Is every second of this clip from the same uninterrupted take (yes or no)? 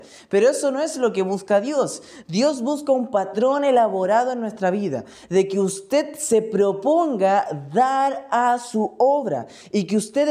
yes